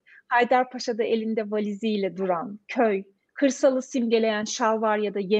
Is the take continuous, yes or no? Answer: yes